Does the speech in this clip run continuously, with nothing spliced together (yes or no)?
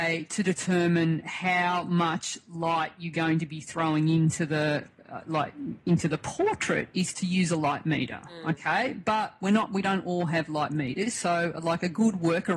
yes